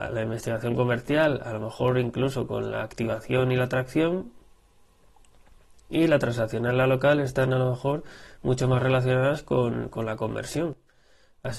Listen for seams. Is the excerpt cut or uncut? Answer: uncut